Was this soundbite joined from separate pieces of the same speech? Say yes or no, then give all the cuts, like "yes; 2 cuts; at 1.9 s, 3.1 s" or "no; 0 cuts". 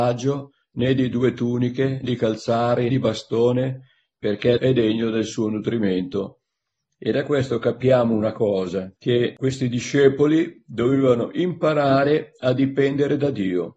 yes; 3 cuts; at 2.0 s, 2.9 s, 4.6 s